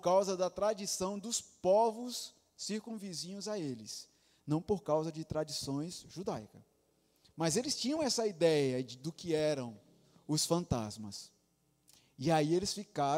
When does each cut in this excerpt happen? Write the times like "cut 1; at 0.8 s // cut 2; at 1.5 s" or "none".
none

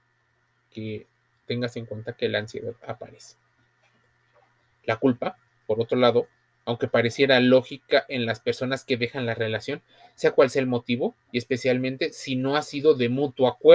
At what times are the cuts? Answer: none

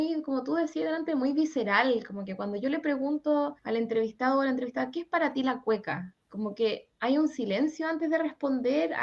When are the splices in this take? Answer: cut 1; at 3.6 s // cut 2; at 6.2 s

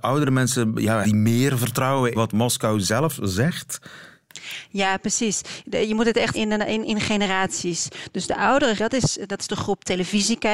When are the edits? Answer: cut 1; at 1.0 s // cut 2; at 2.1 s // cut 3; at 6.3 s // cut 4; at 8.8 s // cut 5; at 9.5 s

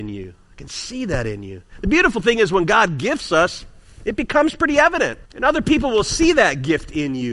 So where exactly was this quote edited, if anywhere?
cut 1; at 5.3 s

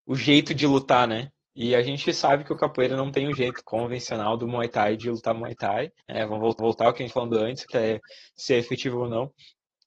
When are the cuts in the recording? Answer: cut 1; at 5.0 s // cut 2; at 6.0 s // cut 3; at 6.6 s // cut 4; at 7.1 s // cut 5; at 7.7 s

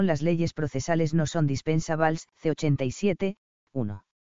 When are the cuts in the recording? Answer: cut 1; at 2.3 s

